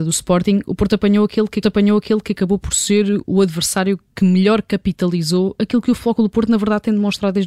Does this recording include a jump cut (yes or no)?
yes